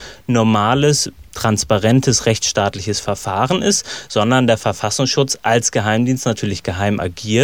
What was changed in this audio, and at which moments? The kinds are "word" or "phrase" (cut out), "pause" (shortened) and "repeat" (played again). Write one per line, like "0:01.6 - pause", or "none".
none